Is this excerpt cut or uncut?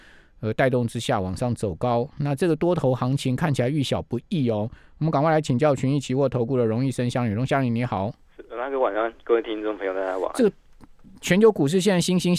uncut